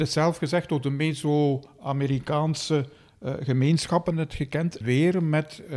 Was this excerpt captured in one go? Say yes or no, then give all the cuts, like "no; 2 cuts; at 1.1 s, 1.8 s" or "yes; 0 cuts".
no; 2 cuts; at 4.1 s, 4.8 s